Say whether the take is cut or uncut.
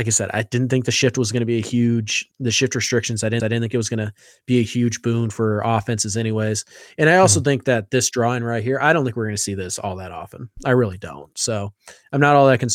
cut